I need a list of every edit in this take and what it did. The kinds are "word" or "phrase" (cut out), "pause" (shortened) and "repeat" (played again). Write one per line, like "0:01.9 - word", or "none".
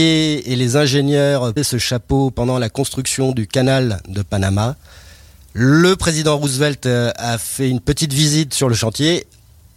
0:01.6 - word